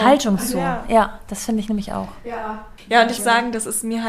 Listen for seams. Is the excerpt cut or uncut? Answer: cut